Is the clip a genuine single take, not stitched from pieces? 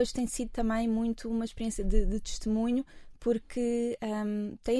yes; 0 cuts

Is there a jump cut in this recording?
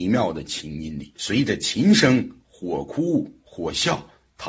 yes; 1 cut; at 1.2 s

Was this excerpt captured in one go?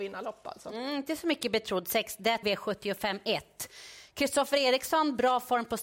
no; 1 cut; at 2.4 s

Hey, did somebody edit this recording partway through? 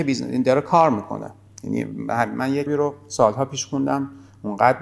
yes; 1 cut; at 2.7 s

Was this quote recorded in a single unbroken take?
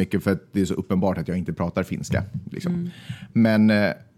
yes; 0 cuts

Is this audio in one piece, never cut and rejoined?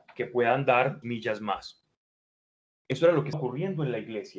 no; 2 cuts; at 1.0 s, 3.3 s

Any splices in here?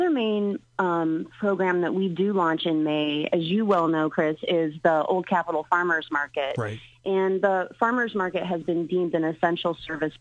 no; 0 cuts

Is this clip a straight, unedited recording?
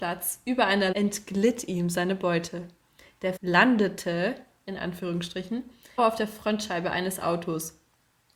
no; 3 cuts; at 0.9 s, 3.4 s, 6.0 s

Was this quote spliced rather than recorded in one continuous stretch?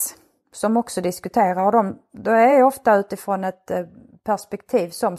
no; 0 cuts

